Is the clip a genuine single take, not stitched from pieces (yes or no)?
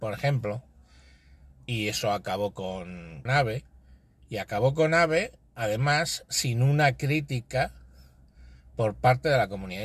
no